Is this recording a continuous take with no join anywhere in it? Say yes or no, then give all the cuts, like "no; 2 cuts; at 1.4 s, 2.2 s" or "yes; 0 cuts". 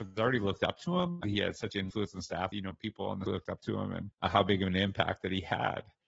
no; 4 cuts; at 1.2 s, 2.5 s, 3.3 s, 4.1 s